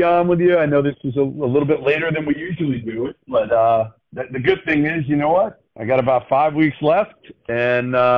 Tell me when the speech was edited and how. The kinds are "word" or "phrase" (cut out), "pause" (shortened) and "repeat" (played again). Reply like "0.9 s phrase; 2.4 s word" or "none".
5.7 s pause